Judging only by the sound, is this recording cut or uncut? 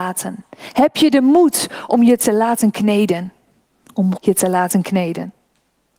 cut